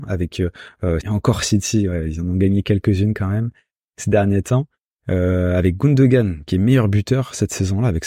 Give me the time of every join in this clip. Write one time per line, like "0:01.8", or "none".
0:01.0